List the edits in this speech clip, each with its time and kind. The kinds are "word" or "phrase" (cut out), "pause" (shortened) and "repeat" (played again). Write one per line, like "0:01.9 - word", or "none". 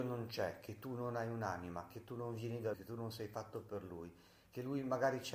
0:02.7 - word